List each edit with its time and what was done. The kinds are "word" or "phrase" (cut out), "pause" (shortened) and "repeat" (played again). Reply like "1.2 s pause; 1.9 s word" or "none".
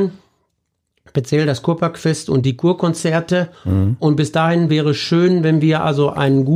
none